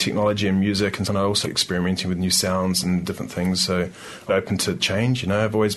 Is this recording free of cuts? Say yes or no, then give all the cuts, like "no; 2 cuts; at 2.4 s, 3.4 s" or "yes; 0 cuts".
no; 3 cuts; at 1.0 s, 1.4 s, 4.3 s